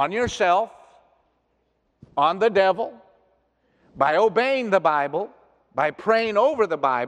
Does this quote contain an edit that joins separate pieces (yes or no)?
no